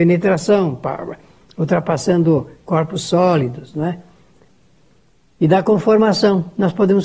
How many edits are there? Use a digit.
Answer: 0